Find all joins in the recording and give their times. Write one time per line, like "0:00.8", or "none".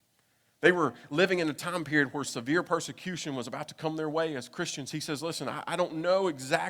none